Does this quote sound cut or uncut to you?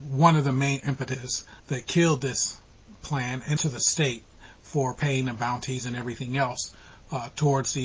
cut